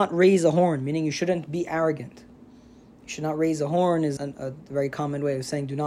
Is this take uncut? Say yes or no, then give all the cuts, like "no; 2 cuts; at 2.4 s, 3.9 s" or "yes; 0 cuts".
no; 1 cut; at 4.2 s